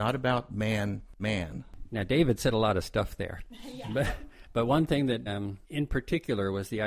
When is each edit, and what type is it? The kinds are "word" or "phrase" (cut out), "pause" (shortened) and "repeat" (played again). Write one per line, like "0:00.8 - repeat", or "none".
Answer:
0:01.2 - word
0:05.3 - word
0:05.6 - pause